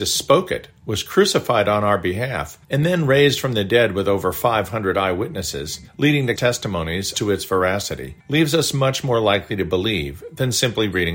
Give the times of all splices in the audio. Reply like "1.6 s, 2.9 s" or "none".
2.6 s, 5.9 s, 6.4 s, 7.1 s, 8.2 s

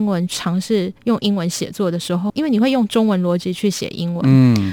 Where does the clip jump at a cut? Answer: 1.0 s

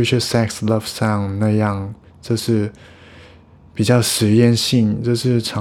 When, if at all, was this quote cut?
none

